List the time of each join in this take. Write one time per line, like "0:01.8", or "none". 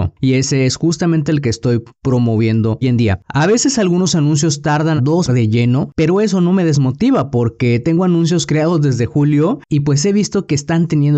0:02.8
0:05.0
0:05.3